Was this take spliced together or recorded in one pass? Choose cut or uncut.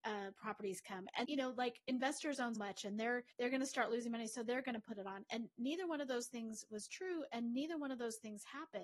cut